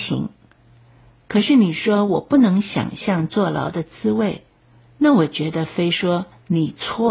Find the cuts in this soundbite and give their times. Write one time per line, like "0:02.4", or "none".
none